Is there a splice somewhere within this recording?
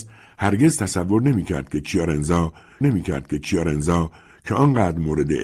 yes; 1 cut; at 2.8 s

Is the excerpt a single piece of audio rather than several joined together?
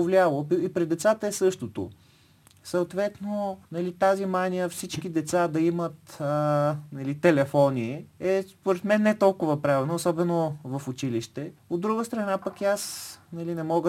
no; 3 cuts; at 3.7 s, 8.1 s, 11.6 s

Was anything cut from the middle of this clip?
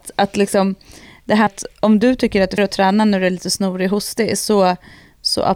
yes; 2 cuts; at 1.5 s, 2.6 s

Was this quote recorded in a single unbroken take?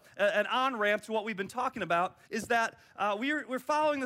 no; 1 cut; at 2.2 s

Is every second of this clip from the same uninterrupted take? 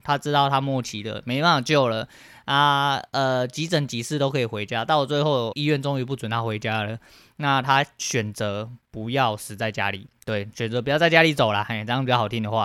no; 1 cut; at 5.5 s

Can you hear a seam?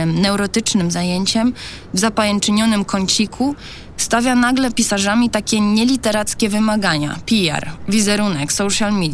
yes; 1 cut; at 4.7 s

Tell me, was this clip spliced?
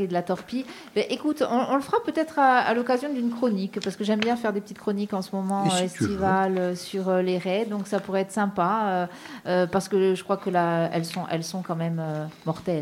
no; 0 cuts

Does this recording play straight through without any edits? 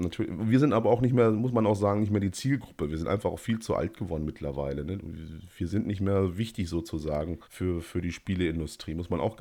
no; 1 cut; at 7.4 s

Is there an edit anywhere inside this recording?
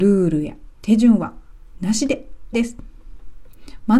yes; 1 cut; at 2.5 s

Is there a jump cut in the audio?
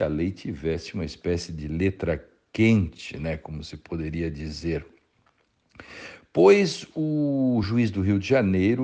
no; 0 cuts

